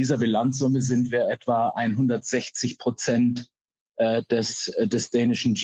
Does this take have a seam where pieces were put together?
no; 0 cuts

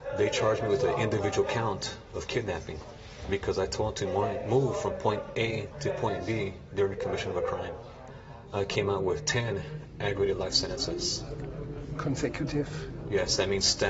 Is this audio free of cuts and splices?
yes; 0 cuts

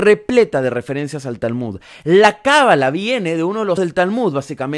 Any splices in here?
yes; 1 cut; at 3.8 s

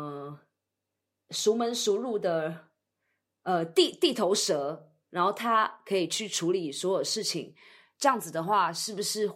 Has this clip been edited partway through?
no; 0 cuts

